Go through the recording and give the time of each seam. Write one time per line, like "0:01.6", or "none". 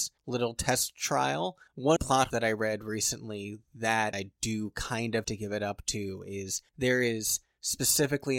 0:02.0
0:02.3
0:04.1
0:05.2